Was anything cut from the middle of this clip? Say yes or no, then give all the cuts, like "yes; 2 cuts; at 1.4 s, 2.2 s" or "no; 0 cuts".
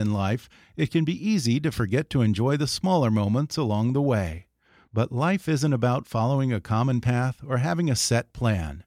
no; 0 cuts